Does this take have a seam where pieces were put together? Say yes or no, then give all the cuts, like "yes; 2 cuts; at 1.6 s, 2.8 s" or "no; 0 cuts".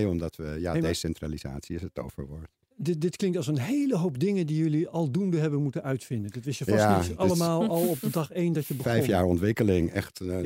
no; 0 cuts